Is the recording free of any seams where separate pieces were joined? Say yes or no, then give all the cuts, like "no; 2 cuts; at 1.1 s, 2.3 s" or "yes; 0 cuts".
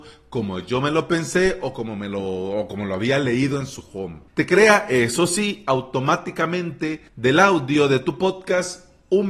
no; 2 cuts; at 4.3 s, 7.1 s